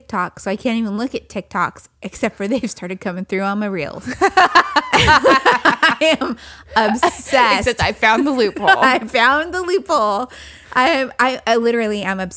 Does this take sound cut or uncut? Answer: cut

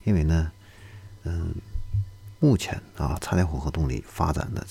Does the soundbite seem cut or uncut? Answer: cut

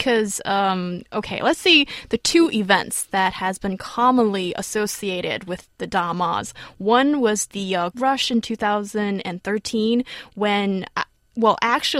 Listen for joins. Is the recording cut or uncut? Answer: cut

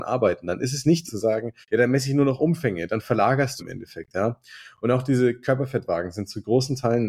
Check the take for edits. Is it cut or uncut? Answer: cut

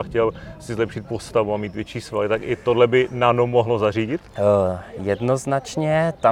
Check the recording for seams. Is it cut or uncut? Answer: cut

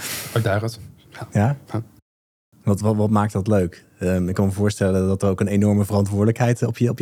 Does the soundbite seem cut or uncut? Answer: uncut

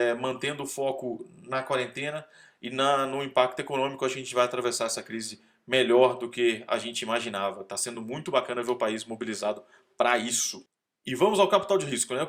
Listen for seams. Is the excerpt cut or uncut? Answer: uncut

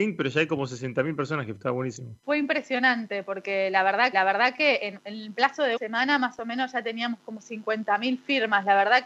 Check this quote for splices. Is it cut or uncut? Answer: cut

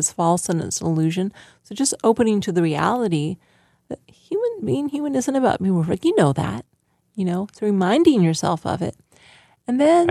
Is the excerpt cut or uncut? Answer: uncut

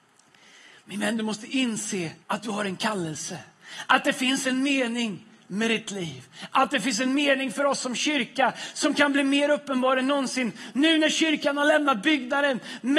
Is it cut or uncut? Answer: cut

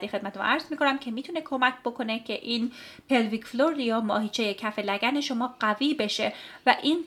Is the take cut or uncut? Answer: uncut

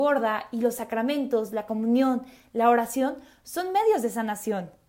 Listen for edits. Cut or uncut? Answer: uncut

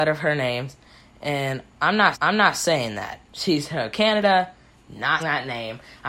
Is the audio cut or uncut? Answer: cut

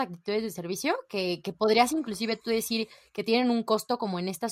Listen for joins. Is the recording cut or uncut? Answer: uncut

